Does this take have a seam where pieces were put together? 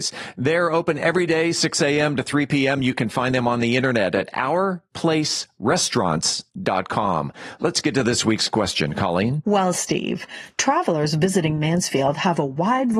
yes; 1 cut; at 6.5 s

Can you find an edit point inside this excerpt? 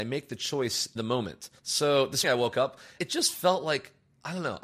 yes; 4 cuts; at 1.0 s, 1.6 s, 2.2 s, 3.0 s

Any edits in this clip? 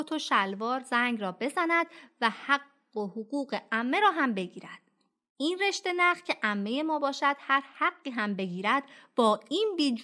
no; 0 cuts

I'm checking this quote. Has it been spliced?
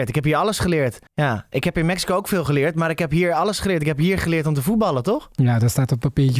yes; 1 cut; at 1.1 s

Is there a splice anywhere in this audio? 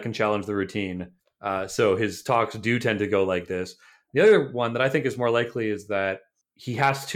yes; 1 cut; at 1.2 s

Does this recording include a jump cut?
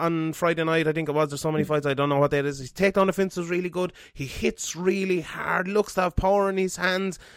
no; 0 cuts

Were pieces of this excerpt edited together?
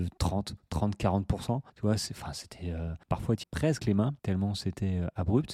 yes; 5 cuts; at 1.7 s, 3.0 s, 3.4 s, 3.8 s, 4.2 s

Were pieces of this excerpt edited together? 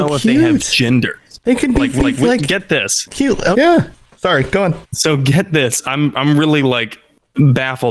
yes; 3 cuts; at 2.0 s, 3.5 s, 4.8 s

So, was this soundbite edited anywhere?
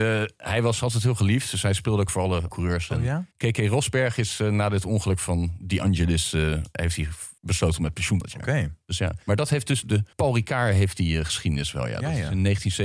yes; 8 cuts; at 2.1 s, 2.5 s, 3.3 s, 7.4 s, 8.2 s, 9.2 s, 9.8 s, 10.1 s

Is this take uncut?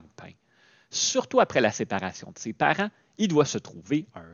yes; 0 cuts

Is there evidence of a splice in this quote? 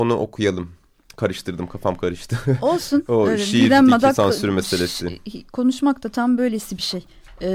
yes; 1 cut; at 5.5 s

